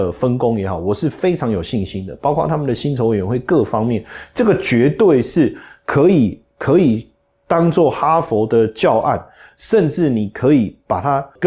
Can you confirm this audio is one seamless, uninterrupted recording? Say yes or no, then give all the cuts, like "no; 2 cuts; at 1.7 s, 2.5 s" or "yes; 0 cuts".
yes; 0 cuts